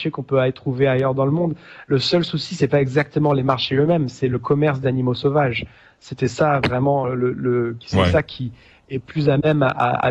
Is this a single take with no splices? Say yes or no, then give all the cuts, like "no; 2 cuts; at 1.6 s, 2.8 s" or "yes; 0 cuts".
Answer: yes; 0 cuts